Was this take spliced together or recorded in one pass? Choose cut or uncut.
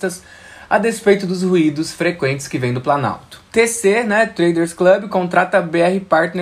cut